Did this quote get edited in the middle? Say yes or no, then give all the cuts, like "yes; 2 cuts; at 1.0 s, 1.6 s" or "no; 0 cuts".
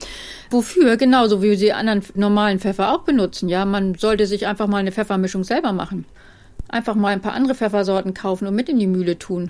no; 0 cuts